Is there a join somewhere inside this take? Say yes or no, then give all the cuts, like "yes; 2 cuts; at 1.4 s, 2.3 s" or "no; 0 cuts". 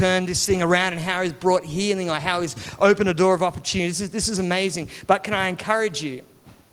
no; 0 cuts